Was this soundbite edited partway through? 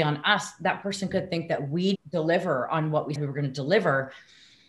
yes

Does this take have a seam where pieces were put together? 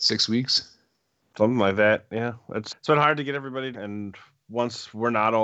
yes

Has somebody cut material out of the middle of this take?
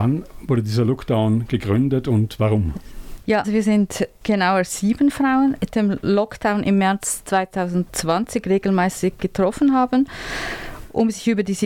yes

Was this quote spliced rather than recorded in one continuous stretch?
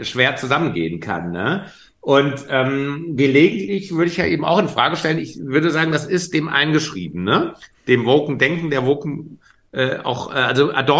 no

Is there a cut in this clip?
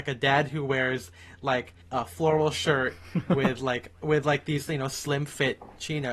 yes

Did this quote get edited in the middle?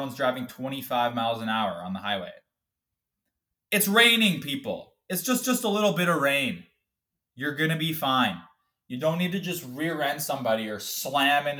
yes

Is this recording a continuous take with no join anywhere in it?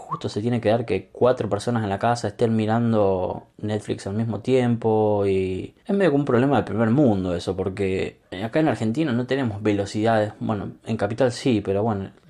no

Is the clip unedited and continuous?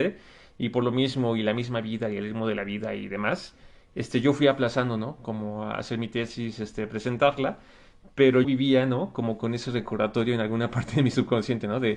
no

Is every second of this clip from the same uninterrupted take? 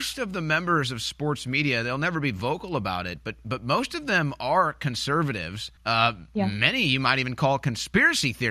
no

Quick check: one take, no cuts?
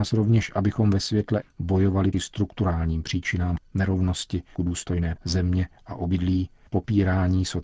no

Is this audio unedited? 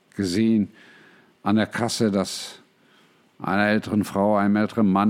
yes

